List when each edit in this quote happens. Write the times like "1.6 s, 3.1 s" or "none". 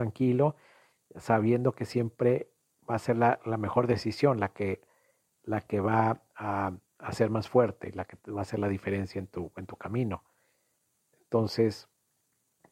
6.9 s